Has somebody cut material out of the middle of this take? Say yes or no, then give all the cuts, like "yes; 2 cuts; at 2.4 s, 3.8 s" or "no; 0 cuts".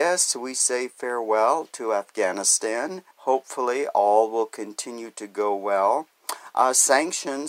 yes; 1 cut; at 3.1 s